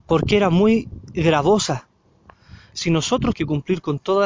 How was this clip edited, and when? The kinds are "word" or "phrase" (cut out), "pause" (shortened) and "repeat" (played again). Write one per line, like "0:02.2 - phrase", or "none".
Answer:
0:02.7 - word
0:03.3 - word